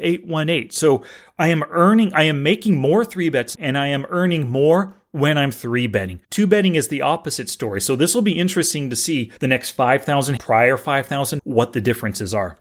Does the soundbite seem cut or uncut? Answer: cut